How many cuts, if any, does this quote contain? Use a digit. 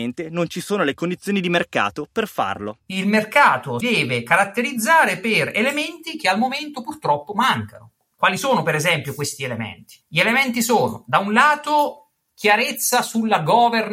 3